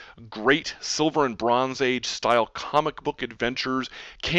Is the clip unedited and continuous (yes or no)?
yes